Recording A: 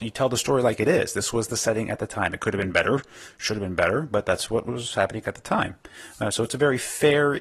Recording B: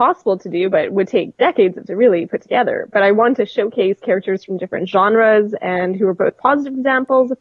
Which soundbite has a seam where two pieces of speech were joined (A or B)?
B